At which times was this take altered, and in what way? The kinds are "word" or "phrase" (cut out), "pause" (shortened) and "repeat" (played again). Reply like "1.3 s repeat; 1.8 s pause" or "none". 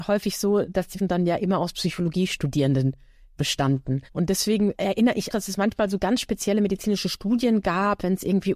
1.0 s word; 4.1 s pause; 5.3 s word